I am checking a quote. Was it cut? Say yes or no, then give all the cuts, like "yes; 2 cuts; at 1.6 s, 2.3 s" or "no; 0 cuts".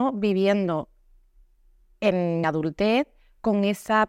yes; 1 cut; at 2.4 s